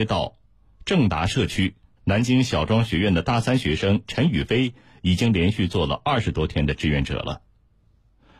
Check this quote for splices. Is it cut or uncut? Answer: uncut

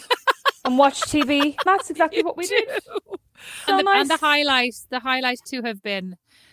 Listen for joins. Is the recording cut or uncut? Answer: cut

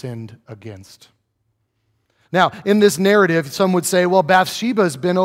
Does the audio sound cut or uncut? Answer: uncut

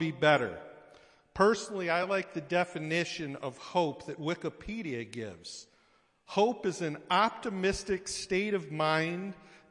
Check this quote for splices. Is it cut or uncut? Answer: uncut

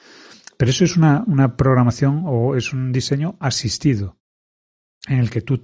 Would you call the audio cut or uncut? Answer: uncut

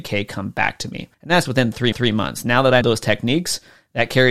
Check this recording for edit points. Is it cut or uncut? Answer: cut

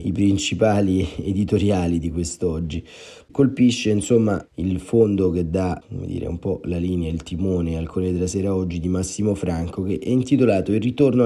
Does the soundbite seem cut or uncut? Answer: uncut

